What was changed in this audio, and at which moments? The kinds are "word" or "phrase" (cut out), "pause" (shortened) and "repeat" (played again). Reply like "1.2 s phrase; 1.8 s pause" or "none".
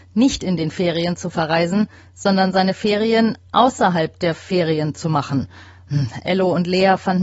none